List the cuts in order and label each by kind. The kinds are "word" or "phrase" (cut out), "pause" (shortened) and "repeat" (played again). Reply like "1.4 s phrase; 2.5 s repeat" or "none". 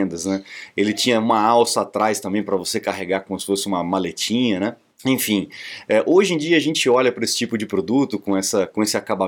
4.9 s pause